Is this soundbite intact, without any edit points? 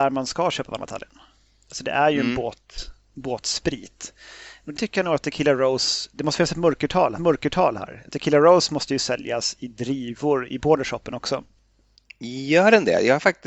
no; 2 cuts; at 4.8 s, 7.2 s

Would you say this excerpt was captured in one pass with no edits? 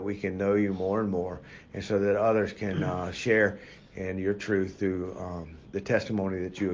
yes; 0 cuts

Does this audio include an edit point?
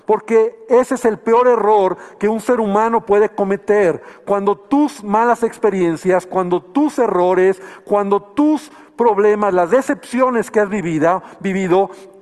no; 0 cuts

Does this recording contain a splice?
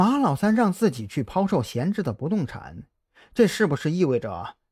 no; 0 cuts

